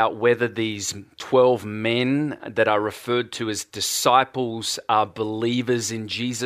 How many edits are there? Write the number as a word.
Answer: zero